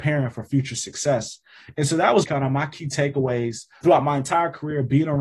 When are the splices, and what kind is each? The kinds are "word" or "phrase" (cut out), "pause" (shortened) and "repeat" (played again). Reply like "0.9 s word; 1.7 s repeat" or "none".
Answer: 2.2 s word; 3.8 s word